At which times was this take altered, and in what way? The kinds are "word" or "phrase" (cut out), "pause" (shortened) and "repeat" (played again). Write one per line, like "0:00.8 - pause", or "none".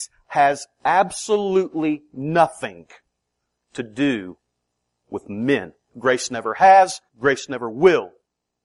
0:07.1 - pause